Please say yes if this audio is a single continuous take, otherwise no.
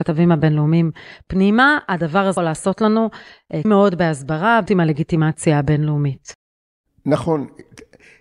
no